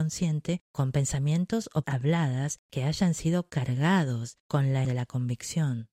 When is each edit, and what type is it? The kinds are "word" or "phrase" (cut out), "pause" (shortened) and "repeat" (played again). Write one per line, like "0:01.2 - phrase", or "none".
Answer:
0:01.8 - word
0:04.8 - word